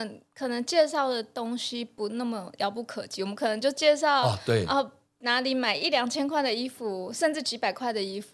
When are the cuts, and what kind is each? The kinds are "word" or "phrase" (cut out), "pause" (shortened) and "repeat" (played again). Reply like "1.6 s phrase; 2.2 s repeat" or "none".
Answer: none